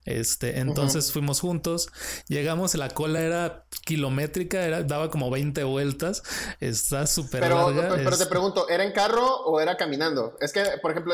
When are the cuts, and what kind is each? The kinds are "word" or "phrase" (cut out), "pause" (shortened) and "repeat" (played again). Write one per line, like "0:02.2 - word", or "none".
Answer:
none